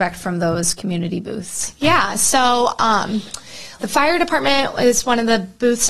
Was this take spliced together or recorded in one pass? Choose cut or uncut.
cut